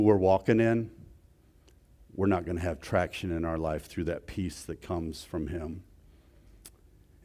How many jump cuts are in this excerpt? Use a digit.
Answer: 0